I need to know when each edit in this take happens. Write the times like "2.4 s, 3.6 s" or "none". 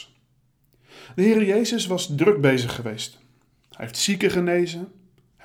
none